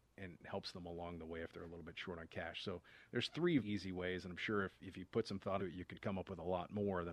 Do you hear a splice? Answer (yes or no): yes